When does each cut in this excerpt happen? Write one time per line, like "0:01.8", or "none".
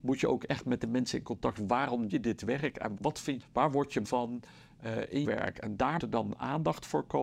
0:02.1
0:03.0
0:03.4
0:04.0
0:05.2
0:06.0